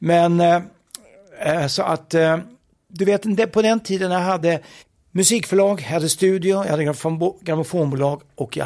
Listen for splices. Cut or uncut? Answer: cut